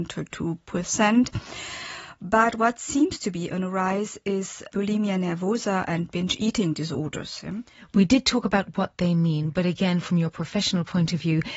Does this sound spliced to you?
no; 0 cuts

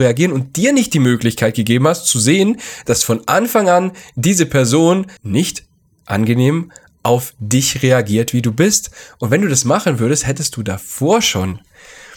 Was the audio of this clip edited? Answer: yes; 1 cut; at 5.2 s

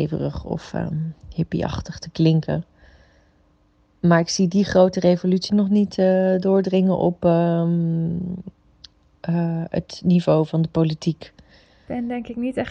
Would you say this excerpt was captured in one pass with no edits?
no; 1 cut; at 5.5 s

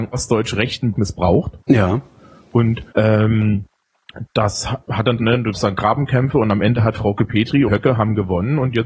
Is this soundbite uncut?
no; 6 cuts; at 0.9 s, 2.9 s, 4.9 s, 5.2 s, 5.5 s, 7.7 s

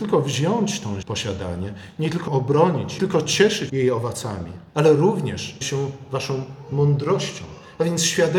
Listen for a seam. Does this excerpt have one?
yes; 6 cuts; at 1.0 s, 2.3 s, 3.0 s, 3.7 s, 4.7 s, 5.6 s

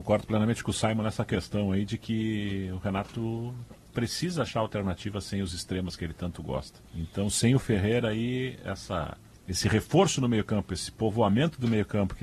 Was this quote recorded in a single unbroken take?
no; 3 cuts; at 3.8 s, 6.9 s, 9.3 s

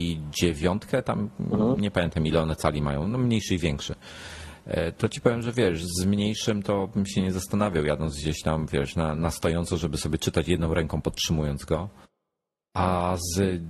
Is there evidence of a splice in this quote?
no; 0 cuts

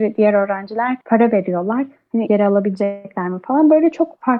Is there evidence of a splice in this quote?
yes; 2 cuts; at 1.0 s, 2.3 s

